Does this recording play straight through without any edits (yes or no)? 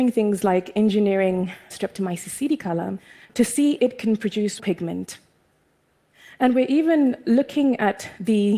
no